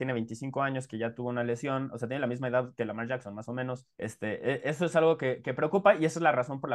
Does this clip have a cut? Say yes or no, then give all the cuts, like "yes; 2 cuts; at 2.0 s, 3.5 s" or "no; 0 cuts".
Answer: yes; 1 cut; at 3.9 s